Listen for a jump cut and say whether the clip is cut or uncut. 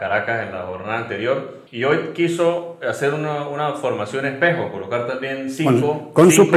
cut